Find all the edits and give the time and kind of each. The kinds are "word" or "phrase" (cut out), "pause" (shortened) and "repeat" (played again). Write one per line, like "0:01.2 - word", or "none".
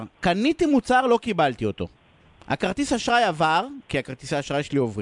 none